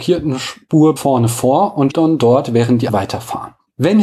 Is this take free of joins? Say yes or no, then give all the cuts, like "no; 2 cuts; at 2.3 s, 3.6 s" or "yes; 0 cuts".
no; 3 cuts; at 1.0 s, 1.9 s, 2.9 s